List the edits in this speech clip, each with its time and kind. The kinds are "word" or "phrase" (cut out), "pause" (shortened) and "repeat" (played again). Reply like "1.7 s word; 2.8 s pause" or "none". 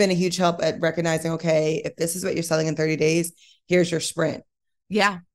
none